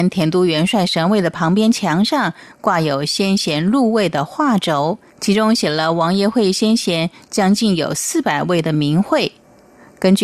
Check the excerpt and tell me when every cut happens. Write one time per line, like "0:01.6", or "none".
0:05.1